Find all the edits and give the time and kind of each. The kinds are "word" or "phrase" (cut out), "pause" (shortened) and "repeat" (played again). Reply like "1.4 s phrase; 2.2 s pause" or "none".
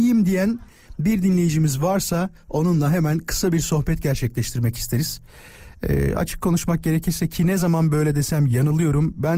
none